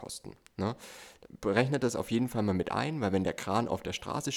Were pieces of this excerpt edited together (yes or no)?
no